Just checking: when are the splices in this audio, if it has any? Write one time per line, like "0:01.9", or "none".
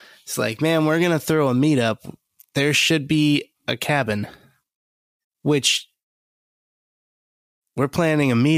none